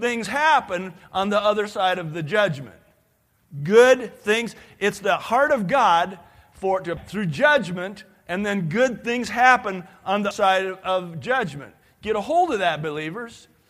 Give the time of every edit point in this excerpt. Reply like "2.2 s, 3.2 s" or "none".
7.0 s, 10.3 s